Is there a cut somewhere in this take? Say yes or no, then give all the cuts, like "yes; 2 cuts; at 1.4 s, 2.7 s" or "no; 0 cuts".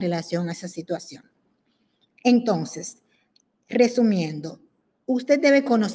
no; 0 cuts